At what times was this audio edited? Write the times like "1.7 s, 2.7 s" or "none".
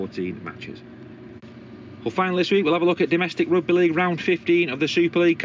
none